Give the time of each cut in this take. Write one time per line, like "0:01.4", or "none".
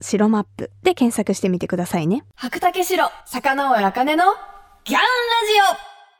0:03.2

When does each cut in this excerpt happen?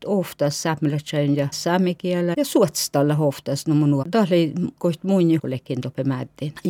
0:01.5
0:02.3
0:04.0
0:05.4

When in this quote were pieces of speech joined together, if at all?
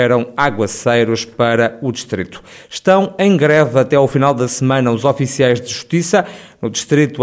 none

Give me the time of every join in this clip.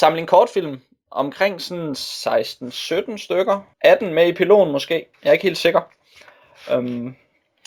0:03.7
0:05.1

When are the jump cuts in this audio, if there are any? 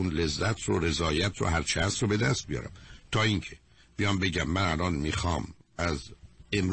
none

